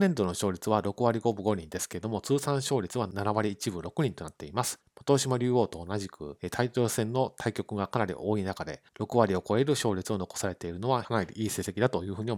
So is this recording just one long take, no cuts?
no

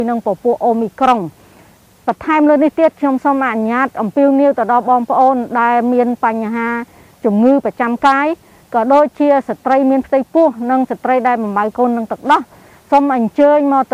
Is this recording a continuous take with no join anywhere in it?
yes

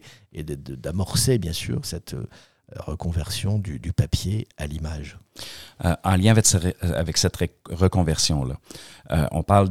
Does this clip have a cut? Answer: no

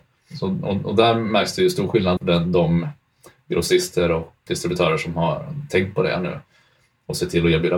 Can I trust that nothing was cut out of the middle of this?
no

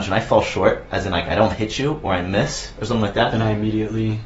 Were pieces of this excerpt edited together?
no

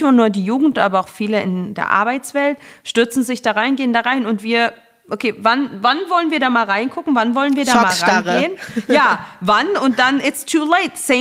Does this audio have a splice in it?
no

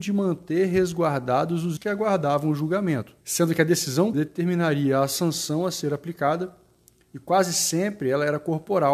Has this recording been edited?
yes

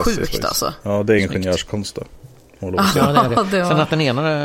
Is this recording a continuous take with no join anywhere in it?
yes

